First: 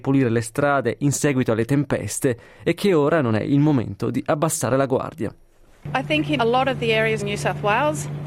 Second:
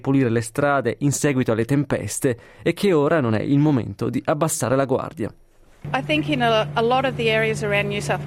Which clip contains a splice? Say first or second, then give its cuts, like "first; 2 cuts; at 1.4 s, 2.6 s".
first; 2 cuts; at 6.4 s, 7.2 s